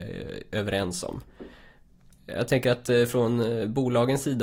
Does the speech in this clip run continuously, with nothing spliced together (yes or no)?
yes